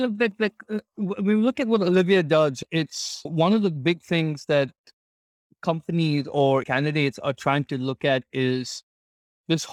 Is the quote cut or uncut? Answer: cut